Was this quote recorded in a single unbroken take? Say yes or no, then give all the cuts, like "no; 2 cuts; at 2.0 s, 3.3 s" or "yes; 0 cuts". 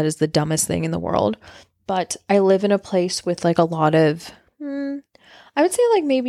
yes; 0 cuts